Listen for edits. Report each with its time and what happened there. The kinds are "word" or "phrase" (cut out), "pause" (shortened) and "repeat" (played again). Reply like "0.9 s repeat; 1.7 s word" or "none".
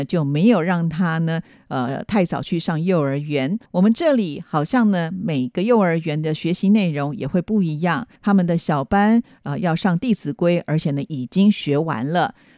3.7 s pause; 8.2 s pause